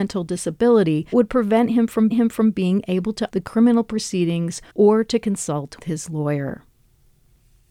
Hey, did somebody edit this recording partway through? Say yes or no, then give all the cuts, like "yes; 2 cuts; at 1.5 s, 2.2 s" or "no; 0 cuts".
yes; 5 cuts; at 1.1 s, 2.1 s, 3.3 s, 4.7 s, 5.8 s